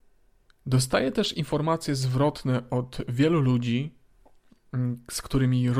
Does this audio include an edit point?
no; 0 cuts

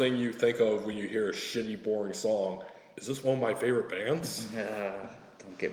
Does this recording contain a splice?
no; 0 cuts

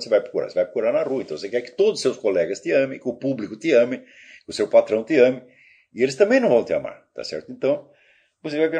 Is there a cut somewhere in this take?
no; 0 cuts

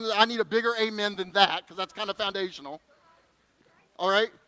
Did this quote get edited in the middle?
no; 0 cuts

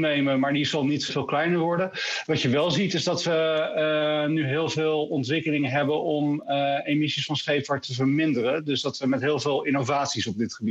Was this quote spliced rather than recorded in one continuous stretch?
yes; 1 cut; at 1.1 s

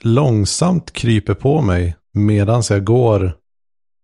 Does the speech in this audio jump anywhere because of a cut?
yes; 1 cut; at 2.0 s

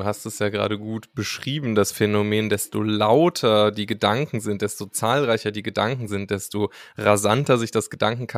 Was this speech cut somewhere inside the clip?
no; 0 cuts

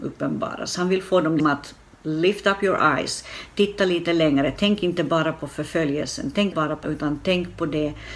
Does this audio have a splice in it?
yes; 3 cuts; at 1.4 s, 6.5 s, 6.8 s

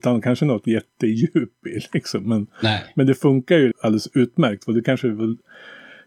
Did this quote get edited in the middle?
yes; 1 cut; at 3.7 s

